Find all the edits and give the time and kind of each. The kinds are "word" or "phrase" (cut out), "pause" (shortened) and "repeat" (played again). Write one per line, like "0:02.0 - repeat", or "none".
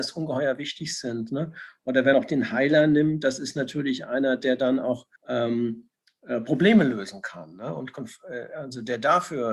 0:02.1 - word
0:05.2 - pause